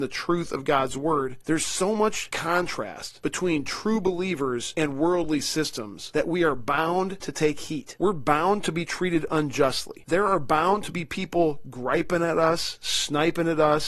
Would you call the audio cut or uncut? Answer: uncut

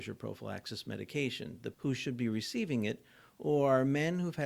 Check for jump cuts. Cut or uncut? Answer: cut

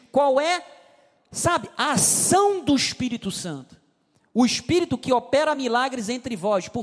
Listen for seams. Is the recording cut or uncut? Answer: uncut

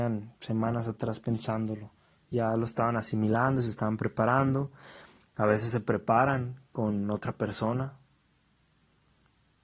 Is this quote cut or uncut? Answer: uncut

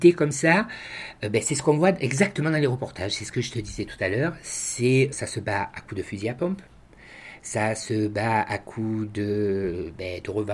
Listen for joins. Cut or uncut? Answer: cut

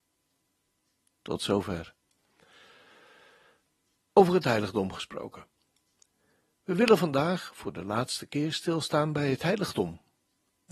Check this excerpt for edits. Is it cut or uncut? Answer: uncut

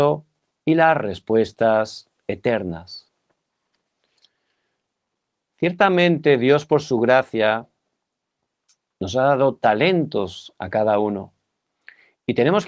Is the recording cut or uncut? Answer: uncut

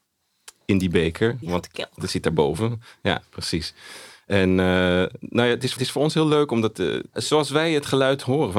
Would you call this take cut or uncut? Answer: cut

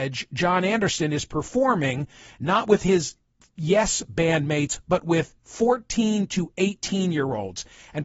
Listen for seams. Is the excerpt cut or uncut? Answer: uncut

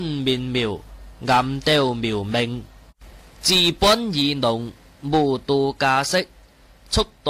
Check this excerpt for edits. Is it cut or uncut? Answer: uncut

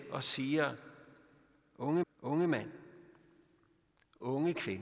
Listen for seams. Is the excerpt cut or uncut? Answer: cut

